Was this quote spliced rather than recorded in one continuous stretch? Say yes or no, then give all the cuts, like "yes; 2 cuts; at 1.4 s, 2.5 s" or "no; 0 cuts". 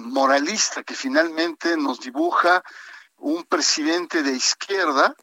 no; 0 cuts